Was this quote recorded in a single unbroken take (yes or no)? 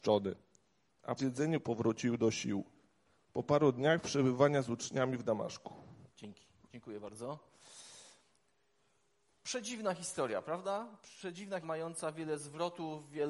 no